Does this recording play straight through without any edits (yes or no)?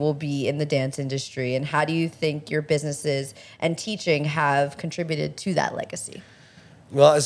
yes